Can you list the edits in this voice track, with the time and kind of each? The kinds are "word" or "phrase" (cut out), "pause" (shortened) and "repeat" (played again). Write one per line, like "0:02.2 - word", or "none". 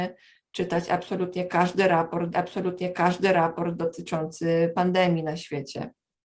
0:02.3 - repeat